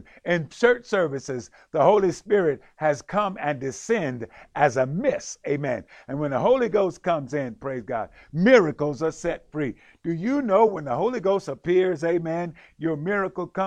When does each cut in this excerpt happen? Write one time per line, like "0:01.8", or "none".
none